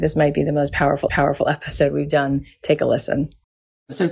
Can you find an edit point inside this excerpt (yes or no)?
yes